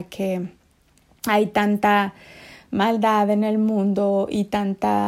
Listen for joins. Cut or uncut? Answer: uncut